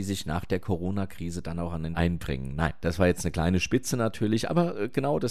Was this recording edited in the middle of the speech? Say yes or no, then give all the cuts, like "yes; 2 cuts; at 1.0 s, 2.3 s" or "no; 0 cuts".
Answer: yes; 1 cut; at 1.9 s